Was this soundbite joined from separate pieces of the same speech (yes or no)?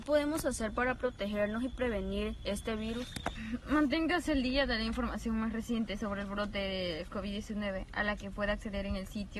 no